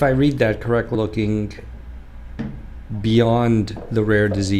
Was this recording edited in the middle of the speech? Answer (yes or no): yes